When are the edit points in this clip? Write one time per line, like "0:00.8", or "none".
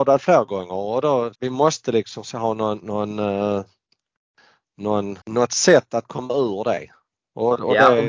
0:01.3
0:05.2